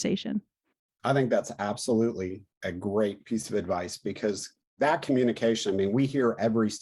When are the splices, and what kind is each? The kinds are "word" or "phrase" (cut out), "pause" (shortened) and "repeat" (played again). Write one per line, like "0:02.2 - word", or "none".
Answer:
none